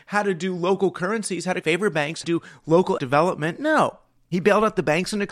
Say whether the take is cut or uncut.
cut